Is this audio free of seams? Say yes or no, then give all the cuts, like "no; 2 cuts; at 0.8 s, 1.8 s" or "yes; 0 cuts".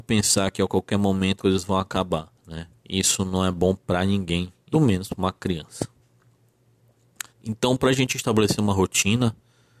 no; 4 cuts; at 1.4 s, 2.4 s, 4.7 s, 7.3 s